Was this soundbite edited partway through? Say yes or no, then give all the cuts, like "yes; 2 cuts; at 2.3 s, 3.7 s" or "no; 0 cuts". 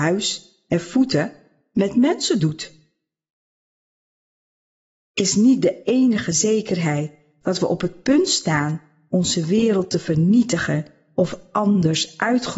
no; 0 cuts